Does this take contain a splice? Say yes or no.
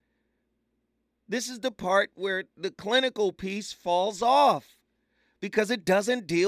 no